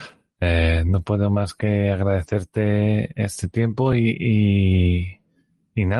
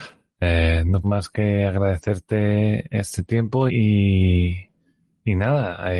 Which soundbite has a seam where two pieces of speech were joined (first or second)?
second